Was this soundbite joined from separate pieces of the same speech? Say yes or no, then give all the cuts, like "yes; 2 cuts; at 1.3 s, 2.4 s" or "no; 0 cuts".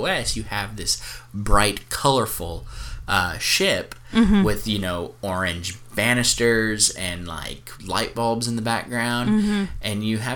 yes; 1 cut; at 7.8 s